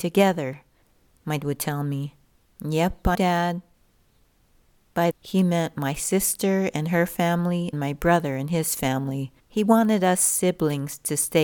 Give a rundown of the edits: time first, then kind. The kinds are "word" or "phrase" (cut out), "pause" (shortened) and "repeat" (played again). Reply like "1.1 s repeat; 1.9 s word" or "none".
1.4 s word; 2.2 s pause; 3.1 s word; 5.1 s phrase; 7.7 s word; 9.4 s pause